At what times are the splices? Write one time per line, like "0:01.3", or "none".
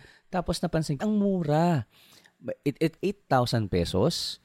0:01.0
0:03.0